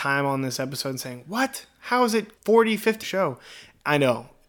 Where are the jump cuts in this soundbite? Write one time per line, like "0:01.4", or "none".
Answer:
0:02.4
0:03.0